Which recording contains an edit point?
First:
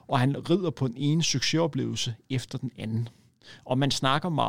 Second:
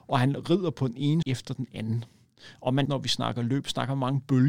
second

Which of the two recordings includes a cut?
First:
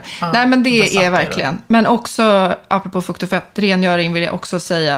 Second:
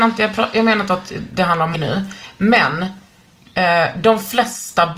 second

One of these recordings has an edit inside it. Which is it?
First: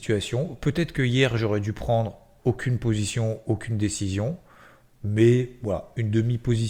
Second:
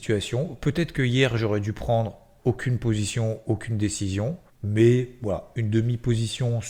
second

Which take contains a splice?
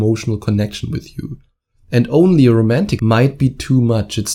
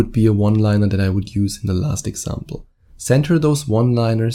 first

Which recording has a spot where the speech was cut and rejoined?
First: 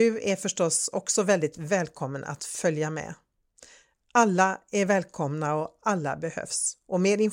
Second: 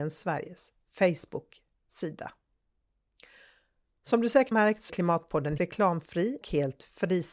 second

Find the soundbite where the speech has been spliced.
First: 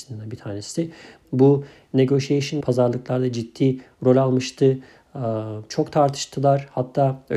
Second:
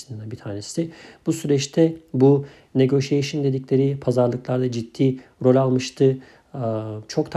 first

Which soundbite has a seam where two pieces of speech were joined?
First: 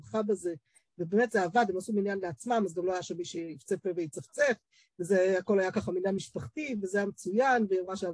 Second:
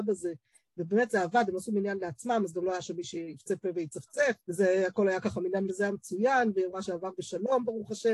second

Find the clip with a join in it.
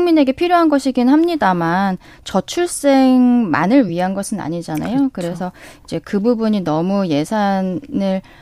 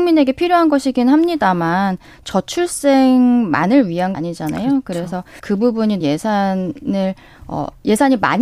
second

